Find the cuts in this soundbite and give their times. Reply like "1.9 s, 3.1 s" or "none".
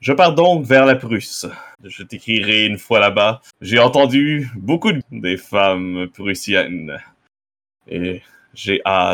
1.7 s, 3.5 s, 5.0 s